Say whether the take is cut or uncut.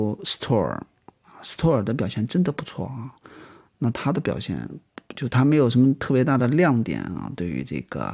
uncut